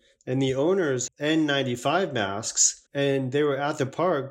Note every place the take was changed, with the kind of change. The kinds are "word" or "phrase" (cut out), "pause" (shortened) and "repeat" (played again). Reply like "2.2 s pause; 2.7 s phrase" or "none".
1.1 s word; 2.9 s pause